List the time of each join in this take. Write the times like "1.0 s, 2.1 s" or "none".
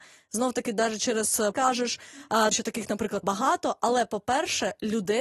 1.5 s, 2.5 s, 3.2 s